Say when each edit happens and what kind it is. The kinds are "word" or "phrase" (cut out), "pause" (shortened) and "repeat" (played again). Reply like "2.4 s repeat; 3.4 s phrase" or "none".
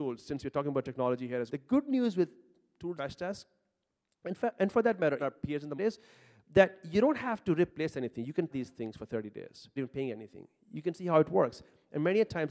1.5 s word; 3.0 s word; 5.2 s word; 5.8 s word; 7.7 s word; 8.5 s word; 9.8 s word